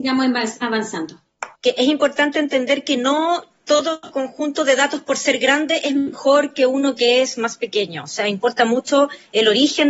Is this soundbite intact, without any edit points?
no; 1 cut; at 1.6 s

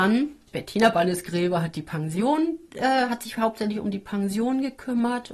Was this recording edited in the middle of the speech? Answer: no; 0 cuts

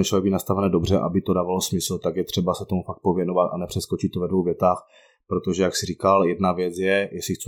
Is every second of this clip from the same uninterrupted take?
yes; 0 cuts

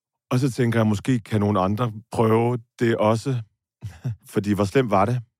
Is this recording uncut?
no; 2 cuts; at 2.1 s, 4.2 s

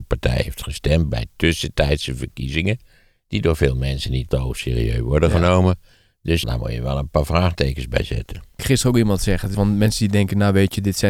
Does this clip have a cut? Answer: yes; 5 cuts; at 1.1 s, 4.3 s, 6.4 s, 8.6 s, 9.5 s

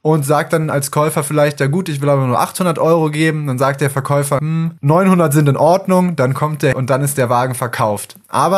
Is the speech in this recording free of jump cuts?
no; 2 cuts; at 4.4 s, 6.7 s

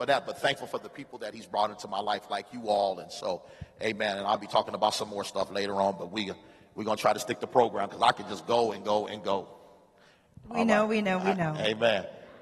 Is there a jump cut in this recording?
no; 0 cuts

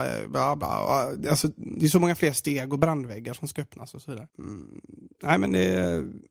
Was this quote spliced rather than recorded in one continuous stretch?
yes; 1 cut; at 4.3 s

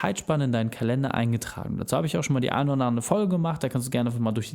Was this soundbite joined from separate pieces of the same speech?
no; 0 cuts

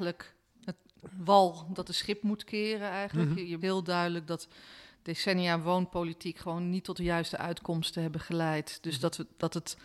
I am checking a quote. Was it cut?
yes; 1 cut; at 3.6 s

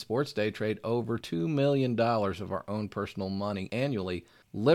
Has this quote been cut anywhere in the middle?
no; 0 cuts

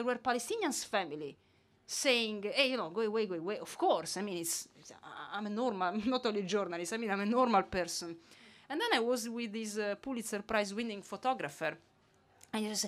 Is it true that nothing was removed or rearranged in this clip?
yes; 0 cuts

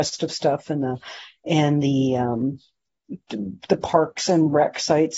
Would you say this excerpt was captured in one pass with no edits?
yes; 0 cuts

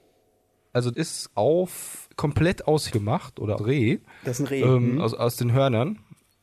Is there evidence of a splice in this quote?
yes; 5 cuts; at 0.9 s, 1.3 s, 2.1 s, 2.9 s, 3.6 s

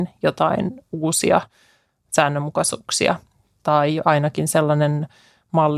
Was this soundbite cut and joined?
no; 0 cuts

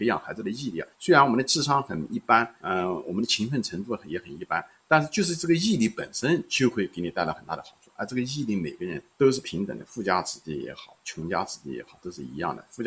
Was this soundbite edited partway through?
yes; 3 cuts; at 0.9 s, 2.6 s, 9.1 s

